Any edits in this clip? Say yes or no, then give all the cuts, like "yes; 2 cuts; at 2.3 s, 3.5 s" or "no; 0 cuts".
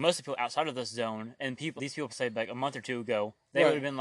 yes; 2 cuts; at 1.8 s, 2.1 s